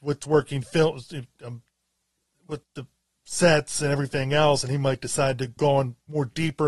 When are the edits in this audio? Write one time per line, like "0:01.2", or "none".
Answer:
0:02.6
0:05.6